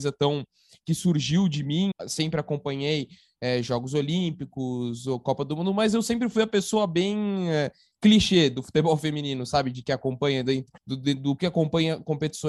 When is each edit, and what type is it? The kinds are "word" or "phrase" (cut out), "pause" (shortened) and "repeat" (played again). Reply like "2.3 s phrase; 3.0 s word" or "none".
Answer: 1.9 s word; 10.8 s pause; 11.4 s word